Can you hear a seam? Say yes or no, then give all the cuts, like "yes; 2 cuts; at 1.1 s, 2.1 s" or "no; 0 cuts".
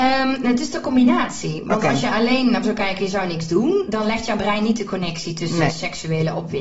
yes; 1 cut; at 2.6 s